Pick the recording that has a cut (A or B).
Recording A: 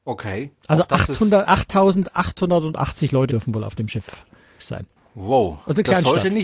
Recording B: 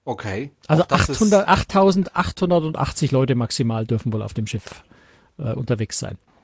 A